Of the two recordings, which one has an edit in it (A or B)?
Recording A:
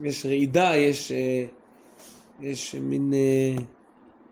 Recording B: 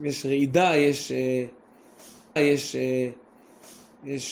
B